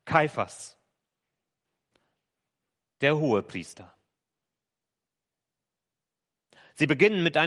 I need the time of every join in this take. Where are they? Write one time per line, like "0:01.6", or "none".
none